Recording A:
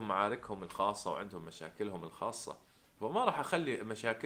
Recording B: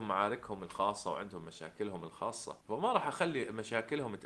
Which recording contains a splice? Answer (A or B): B